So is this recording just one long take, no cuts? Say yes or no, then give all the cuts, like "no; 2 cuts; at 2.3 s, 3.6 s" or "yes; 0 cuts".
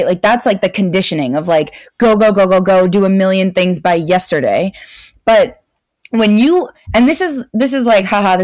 yes; 0 cuts